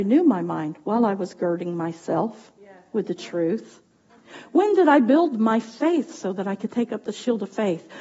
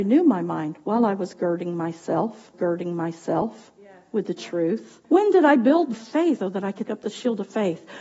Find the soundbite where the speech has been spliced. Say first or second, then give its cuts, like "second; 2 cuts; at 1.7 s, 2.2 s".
second; 5 cuts; at 2.5 s, 5.0 s, 5.9 s, 6.4 s, 6.9 s